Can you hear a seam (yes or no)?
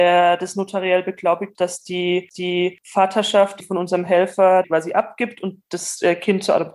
yes